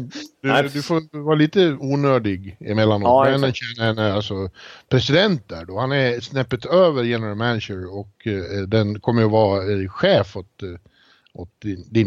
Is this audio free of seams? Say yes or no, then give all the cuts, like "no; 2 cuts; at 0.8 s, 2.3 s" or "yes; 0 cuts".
yes; 0 cuts